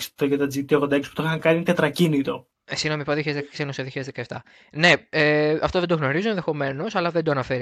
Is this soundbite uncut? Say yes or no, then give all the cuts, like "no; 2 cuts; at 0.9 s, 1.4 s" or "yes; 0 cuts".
yes; 0 cuts